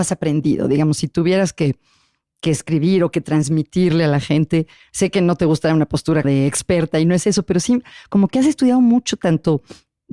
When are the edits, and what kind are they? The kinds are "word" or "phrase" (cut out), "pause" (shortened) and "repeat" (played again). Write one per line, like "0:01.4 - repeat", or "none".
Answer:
0:06.2 - word